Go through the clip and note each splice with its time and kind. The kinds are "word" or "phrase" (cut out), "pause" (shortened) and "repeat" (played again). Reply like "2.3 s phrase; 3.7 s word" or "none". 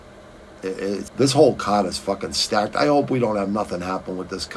1.1 s word